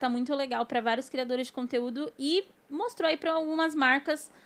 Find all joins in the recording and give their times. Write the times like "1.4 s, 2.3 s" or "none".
2.5 s